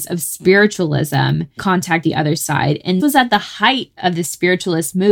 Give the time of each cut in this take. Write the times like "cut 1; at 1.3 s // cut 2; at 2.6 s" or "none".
cut 1; at 1.6 s // cut 2; at 2.0 s // cut 3; at 3.0 s